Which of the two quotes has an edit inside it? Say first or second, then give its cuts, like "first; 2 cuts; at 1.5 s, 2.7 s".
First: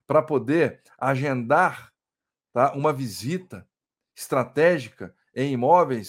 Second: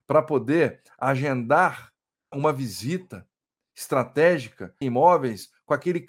second; 2 cuts; at 2.3 s, 4.8 s